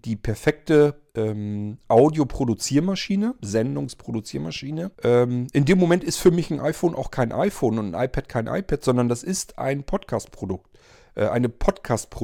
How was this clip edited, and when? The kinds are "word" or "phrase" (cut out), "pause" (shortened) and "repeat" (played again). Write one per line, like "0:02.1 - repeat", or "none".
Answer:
0:01.1 - pause
0:04.9 - pause